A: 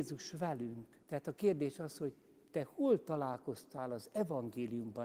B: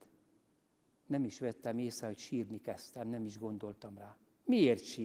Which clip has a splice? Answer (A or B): A